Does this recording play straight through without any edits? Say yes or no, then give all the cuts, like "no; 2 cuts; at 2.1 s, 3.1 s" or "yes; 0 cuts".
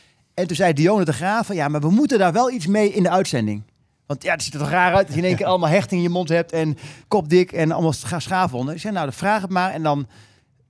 no; 1 cut; at 7.0 s